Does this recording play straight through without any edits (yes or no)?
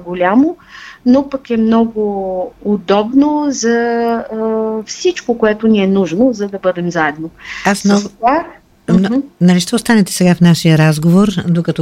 yes